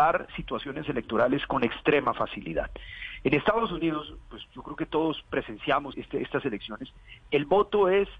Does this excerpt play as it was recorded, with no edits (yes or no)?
no